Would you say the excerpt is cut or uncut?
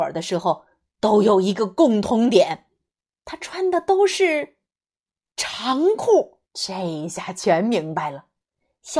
cut